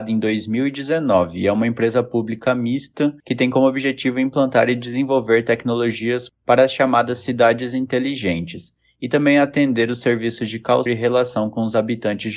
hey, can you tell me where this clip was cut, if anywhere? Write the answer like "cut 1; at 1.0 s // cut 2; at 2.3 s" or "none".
cut 1; at 3.2 s // cut 2; at 10.9 s